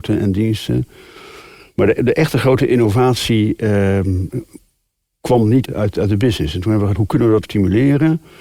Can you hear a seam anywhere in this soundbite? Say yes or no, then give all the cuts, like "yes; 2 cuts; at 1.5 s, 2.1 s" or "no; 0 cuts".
yes; 3 cuts; at 5.6 s, 6.9 s, 7.4 s